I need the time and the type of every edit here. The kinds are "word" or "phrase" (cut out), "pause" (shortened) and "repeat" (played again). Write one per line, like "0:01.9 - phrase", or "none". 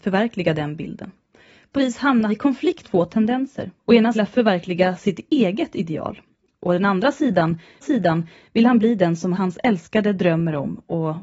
0:01.8 - word
0:02.3 - word
0:02.8 - word
0:03.8 - pause
0:04.1 - phrase
0:07.8 - repeat